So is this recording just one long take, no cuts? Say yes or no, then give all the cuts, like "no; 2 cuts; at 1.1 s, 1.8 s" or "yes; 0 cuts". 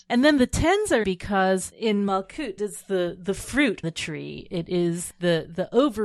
no; 5 cuts; at 1.0 s, 1.7 s, 2.6 s, 3.8 s, 5.1 s